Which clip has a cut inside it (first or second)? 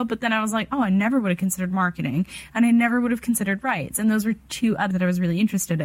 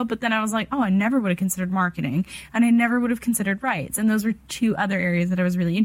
first